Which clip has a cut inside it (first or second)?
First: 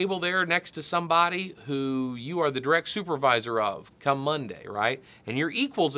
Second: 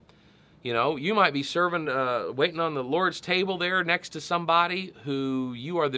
first